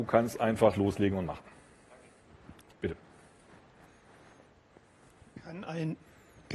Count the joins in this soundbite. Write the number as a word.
zero